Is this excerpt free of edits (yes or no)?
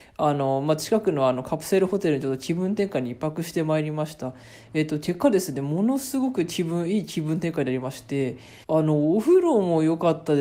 no